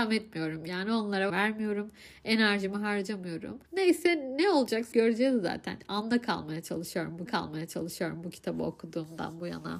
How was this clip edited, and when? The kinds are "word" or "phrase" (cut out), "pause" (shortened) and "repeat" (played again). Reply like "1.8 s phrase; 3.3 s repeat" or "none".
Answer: 1.3 s word; 3.7 s pause; 4.9 s word; 7.3 s repeat